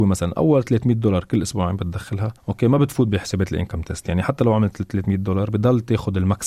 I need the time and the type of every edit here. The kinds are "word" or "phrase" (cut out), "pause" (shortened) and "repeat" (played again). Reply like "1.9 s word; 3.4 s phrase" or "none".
none